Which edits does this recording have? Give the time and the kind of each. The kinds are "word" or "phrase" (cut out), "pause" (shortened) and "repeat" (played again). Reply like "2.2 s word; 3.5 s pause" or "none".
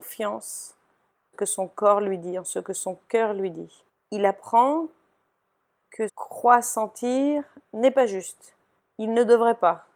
1.3 s phrase; 3.9 s pause; 6.1 s phrase